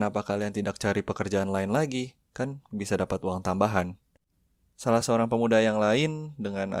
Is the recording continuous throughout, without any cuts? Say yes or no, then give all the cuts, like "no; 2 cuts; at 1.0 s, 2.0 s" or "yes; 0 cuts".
yes; 0 cuts